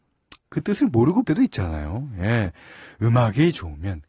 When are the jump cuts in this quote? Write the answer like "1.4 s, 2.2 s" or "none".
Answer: 1.2 s